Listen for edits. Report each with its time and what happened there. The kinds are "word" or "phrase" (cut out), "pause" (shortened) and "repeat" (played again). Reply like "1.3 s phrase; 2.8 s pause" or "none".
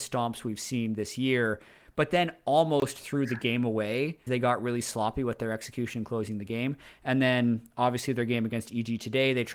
4.3 s word